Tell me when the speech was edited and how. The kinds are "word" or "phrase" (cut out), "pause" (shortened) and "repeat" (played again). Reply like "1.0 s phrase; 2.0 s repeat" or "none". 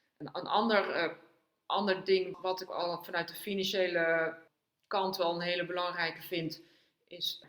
2.7 s word

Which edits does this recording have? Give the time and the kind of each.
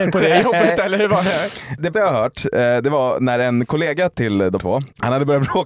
1.9 s word; 4.6 s word

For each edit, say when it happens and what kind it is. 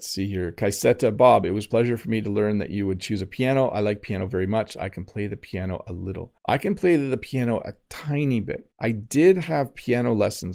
6.4 s pause; 8.7 s pause

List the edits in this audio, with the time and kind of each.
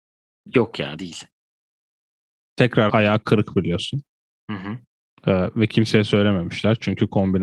2.9 s word; 4.3 s pause

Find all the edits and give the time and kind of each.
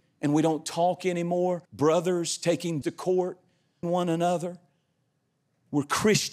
1.6 s pause; 2.8 s word; 3.8 s phrase

